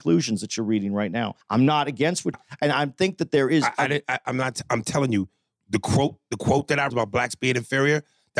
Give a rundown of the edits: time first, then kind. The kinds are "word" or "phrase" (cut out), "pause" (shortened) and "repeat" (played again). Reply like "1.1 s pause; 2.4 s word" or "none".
1.4 s pause; 2.3 s phrase; 6.9 s phrase